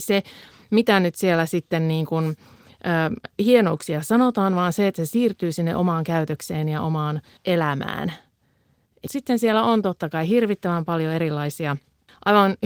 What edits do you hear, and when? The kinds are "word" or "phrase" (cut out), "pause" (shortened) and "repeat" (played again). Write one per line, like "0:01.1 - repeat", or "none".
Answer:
none

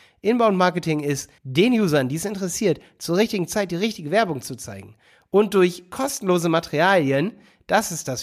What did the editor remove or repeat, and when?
0:01.4 - pause

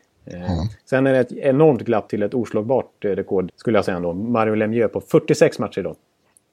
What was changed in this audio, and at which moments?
0:02.1 - word
0:03.5 - word

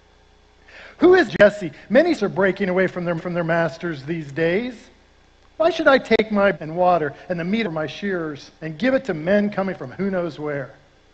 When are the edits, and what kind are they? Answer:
0:01.3 - phrase
0:02.2 - word
0:03.2 - repeat
0:06.5 - word
0:07.6 - phrase
0:08.6 - pause

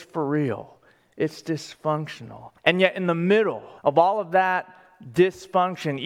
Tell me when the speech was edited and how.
0:02.6 - pause
0:03.8 - pause

